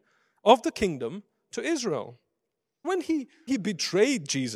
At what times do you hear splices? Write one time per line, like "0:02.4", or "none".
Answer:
0:02.8
0:03.5